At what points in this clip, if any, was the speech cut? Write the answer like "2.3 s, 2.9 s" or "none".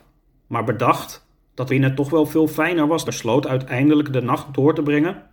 1.7 s, 3.1 s